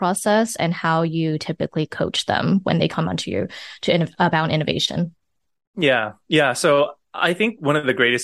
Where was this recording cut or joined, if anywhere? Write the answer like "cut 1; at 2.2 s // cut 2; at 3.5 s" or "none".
none